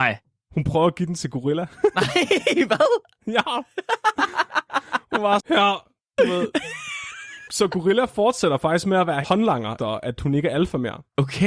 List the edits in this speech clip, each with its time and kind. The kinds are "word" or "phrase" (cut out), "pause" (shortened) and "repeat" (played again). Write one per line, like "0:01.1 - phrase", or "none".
0:05.4 - word
0:07.5 - word
0:09.2 - word
0:09.8 - word

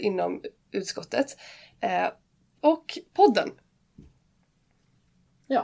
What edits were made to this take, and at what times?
0:02.6 - phrase

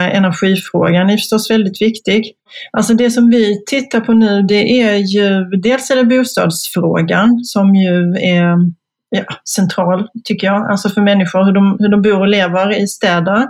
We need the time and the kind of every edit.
none

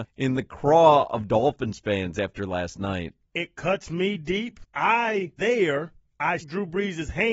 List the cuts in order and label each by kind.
0:05.4 - word
0:06.4 - word

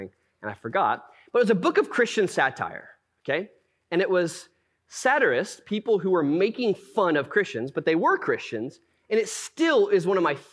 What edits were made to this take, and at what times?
none

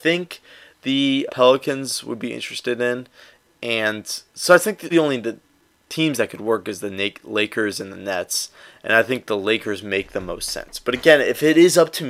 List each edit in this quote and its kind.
0:01.3 - word
0:04.9 - word

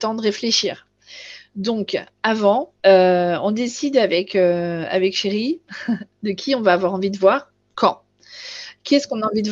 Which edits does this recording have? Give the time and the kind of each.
0:02.8 - pause

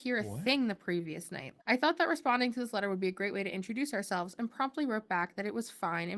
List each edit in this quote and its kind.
0:01.6 - pause

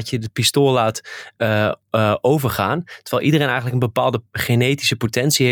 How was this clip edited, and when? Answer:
none

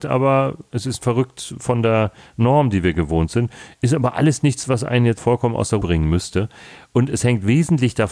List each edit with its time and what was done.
0:01.0 - word
0:05.2 - word
0:05.8 - word

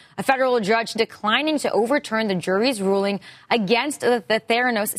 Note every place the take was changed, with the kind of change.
0:01.0 - word

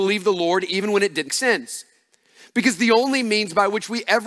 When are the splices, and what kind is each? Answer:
0:01.3 - word

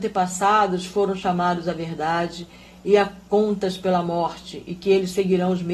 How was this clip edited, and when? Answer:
none

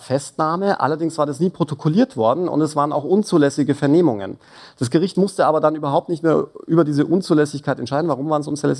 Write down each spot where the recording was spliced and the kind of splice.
none

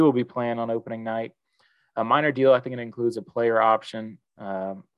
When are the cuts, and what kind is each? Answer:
none

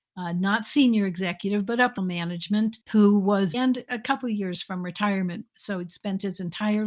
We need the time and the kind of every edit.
0:02.0 - word
0:02.8 - pause
0:03.5 - phrase

